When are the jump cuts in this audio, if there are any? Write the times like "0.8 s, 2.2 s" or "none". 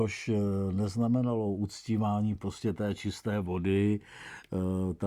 none